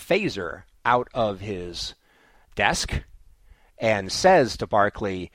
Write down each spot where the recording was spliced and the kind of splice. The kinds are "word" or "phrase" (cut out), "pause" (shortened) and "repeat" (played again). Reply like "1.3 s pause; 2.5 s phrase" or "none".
none